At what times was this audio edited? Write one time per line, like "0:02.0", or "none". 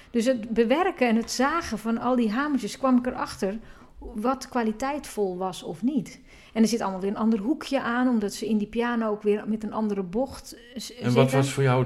none